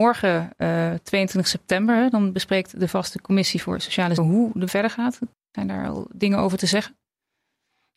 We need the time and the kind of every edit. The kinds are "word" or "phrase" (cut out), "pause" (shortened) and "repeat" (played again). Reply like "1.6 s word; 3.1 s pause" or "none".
4.2 s word; 4.7 s word